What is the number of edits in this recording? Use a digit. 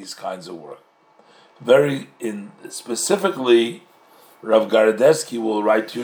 0